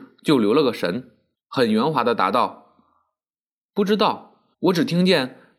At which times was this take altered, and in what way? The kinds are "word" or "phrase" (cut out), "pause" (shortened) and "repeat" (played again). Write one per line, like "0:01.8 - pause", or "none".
0:01.3 - pause
0:04.5 - pause